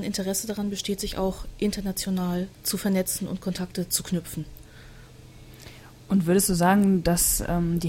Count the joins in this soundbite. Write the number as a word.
one